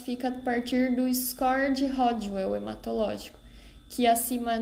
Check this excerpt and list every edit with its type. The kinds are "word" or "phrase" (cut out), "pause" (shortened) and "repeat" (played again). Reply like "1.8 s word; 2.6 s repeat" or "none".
none